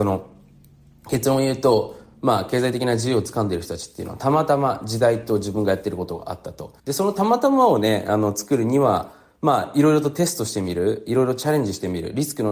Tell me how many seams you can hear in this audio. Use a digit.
1